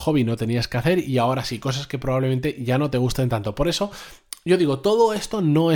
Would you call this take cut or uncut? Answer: uncut